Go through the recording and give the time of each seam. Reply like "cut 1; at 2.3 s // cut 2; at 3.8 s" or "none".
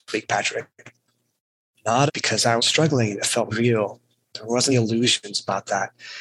cut 1; at 2.1 s // cut 2; at 2.6 s // cut 3; at 3.5 s // cut 4; at 4.7 s